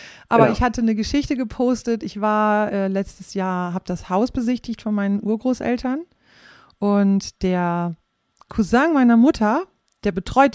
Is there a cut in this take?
no; 0 cuts

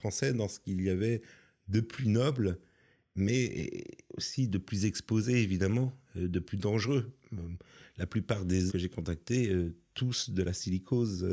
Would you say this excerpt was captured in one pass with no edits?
no; 1 cut; at 8.7 s

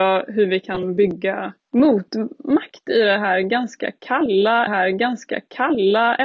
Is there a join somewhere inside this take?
yes; 2 cuts; at 1.6 s, 4.7 s

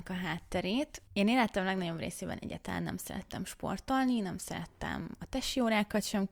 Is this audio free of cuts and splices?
yes; 0 cuts

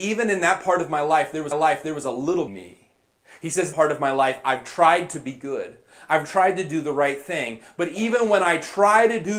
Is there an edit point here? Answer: yes; 3 cuts; at 1.5 s, 2.5 s, 3.7 s

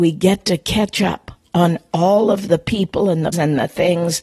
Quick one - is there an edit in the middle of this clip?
yes; 1 cut; at 3.3 s

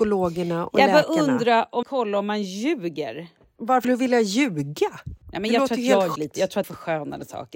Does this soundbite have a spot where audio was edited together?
yes; 5 cuts; at 1.8 s, 3.8 s, 5.2 s, 6.2 s, 6.6 s

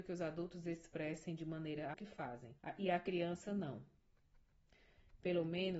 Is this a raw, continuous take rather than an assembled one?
no; 2 cuts; at 1.9 s, 2.6 s

